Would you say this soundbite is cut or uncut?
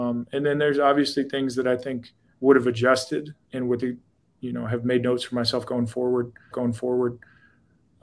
cut